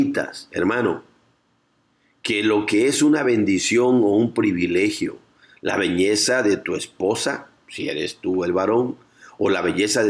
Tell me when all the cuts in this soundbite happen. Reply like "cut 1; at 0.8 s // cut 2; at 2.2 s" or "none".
none

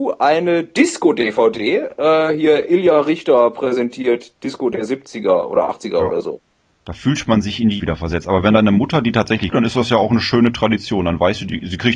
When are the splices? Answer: cut 1; at 7.8 s // cut 2; at 9.5 s

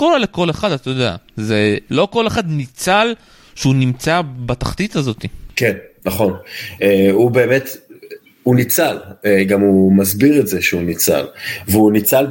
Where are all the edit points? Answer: none

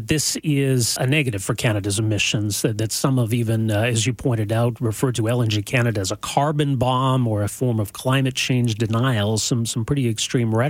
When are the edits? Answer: cut 1; at 1.0 s

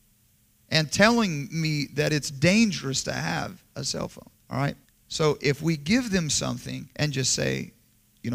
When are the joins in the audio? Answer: cut 1; at 4.3 s // cut 2; at 4.8 s // cut 3; at 6.9 s

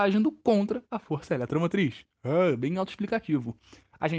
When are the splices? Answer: none

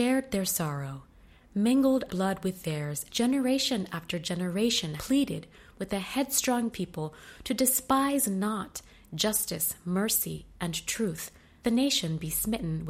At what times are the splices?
cut 1; at 2.1 s // cut 2; at 3.1 s // cut 3; at 5.0 s // cut 4; at 6.7 s // cut 5; at 11.6 s

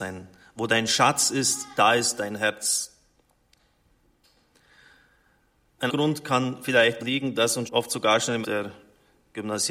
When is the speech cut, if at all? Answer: cut 1; at 5.9 s // cut 2; at 7.0 s // cut 3; at 7.7 s // cut 4; at 8.4 s

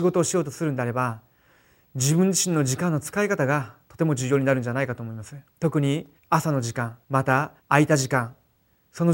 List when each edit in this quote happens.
cut 1; at 5.5 s // cut 2; at 6.2 s // cut 3; at 7.0 s // cut 4; at 7.6 s

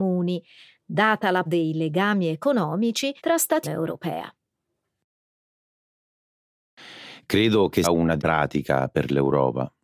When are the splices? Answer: cut 1; at 1.5 s // cut 2; at 3.2 s // cut 3; at 3.6 s // cut 4; at 7.8 s // cut 5; at 8.2 s

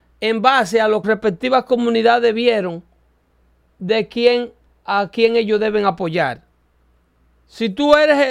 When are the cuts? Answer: cut 1; at 1.0 s

